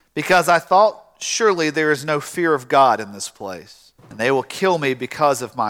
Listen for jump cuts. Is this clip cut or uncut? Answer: cut